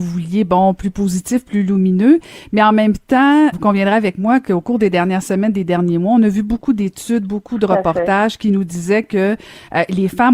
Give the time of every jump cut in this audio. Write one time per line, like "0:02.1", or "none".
0:03.5